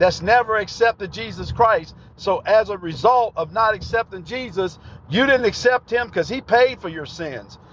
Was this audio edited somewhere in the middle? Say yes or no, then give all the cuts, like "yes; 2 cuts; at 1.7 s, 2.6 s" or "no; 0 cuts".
no; 0 cuts